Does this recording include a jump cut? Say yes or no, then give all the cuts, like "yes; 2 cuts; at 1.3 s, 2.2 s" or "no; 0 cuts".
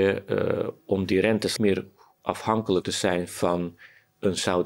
yes; 2 cuts; at 1.6 s, 2.8 s